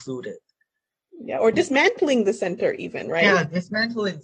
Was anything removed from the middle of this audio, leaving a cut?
no; 0 cuts

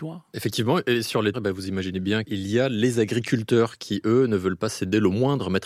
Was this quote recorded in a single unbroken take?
no; 1 cut; at 1.3 s

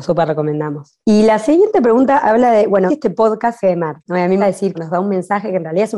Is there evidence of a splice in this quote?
yes; 6 cuts; at 1.0 s, 2.9 s, 3.6 s, 4.0 s, 4.4 s, 4.7 s

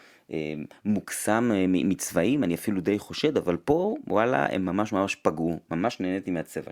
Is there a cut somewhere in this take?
no; 0 cuts

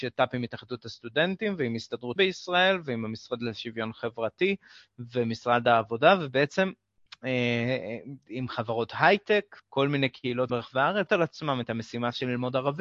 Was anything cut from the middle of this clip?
yes; 4 cuts; at 2.2 s, 9.6 s, 10.5 s, 11.1 s

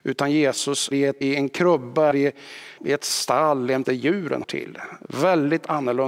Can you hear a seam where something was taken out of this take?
yes; 6 cuts; at 0.9 s, 1.2 s, 2.1 s, 2.8 s, 3.8 s, 4.4 s

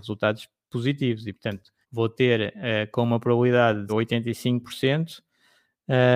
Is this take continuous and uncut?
no; 2 cuts; at 1.8 s, 3.9 s

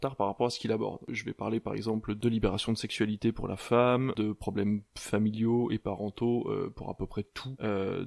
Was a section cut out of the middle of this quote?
no; 0 cuts

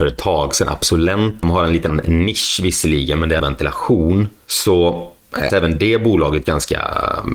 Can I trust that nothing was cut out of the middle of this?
no; 4 cuts; at 1.4 s, 1.9 s, 3.4 s, 5.5 s

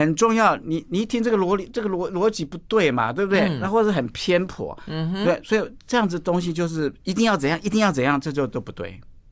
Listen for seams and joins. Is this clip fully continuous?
yes; 0 cuts

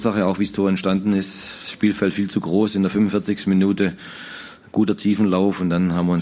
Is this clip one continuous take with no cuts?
yes; 0 cuts

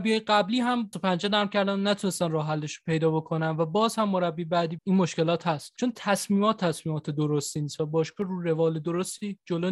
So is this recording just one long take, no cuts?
no; 2 cuts; at 0.9 s, 4.8 s

